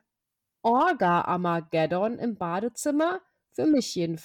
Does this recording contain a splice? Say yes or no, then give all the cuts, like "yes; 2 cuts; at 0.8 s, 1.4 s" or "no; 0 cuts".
no; 0 cuts